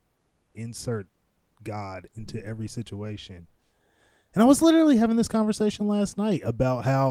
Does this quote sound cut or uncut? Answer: uncut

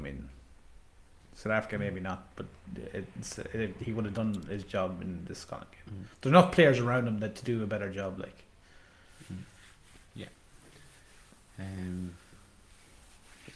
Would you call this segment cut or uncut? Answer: uncut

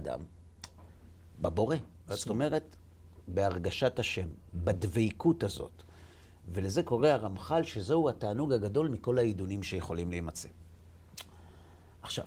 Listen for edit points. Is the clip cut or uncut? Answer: uncut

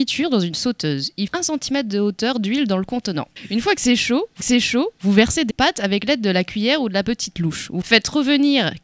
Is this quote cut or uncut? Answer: cut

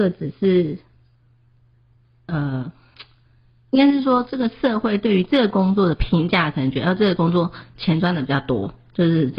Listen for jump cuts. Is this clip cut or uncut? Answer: uncut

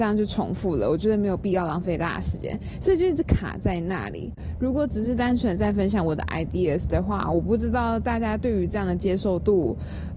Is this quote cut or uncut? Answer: uncut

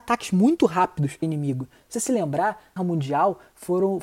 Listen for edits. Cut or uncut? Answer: cut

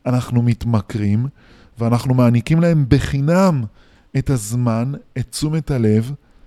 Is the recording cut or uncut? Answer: uncut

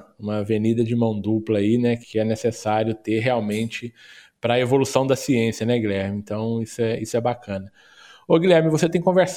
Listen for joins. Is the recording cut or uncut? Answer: uncut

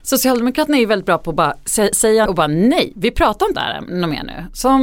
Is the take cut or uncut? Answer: cut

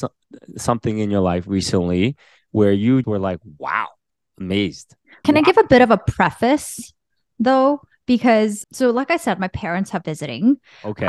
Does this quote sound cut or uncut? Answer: cut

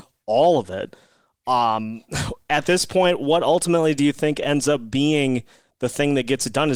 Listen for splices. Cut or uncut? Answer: uncut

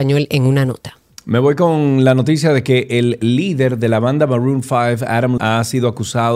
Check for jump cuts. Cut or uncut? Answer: cut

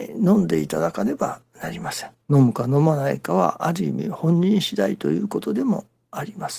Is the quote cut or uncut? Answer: cut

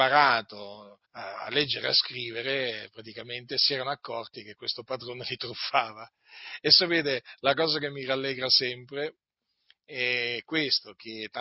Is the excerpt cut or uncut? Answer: cut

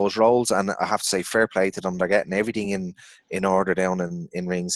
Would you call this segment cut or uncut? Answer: uncut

